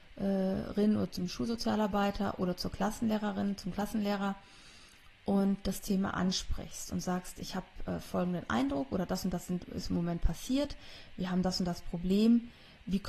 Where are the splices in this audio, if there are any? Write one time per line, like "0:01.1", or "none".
none

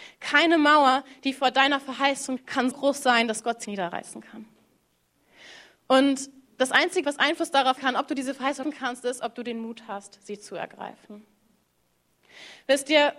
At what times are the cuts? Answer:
0:02.4
0:02.7
0:03.6
0:07.0
0:07.8
0:08.6

